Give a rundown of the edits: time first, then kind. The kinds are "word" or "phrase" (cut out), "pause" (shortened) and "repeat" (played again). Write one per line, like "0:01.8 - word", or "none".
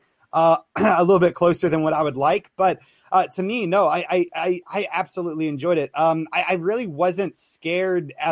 none